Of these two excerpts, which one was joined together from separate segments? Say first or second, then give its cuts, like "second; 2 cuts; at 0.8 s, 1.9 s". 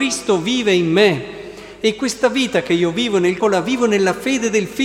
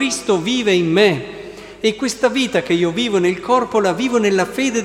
first; 1 cut; at 3.4 s